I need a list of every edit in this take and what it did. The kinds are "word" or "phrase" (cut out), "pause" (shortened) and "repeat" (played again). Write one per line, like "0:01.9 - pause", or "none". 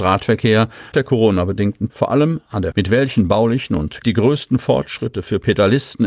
0:00.9 - word
0:01.9 - word
0:02.7 - word
0:04.0 - phrase